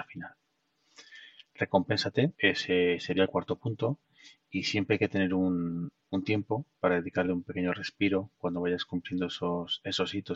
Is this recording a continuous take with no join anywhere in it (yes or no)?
no